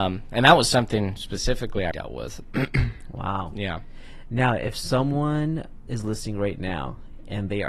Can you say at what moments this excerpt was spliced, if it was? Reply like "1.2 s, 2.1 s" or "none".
1.9 s